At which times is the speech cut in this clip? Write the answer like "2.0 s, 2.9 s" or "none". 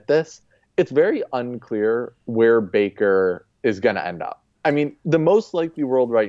4.5 s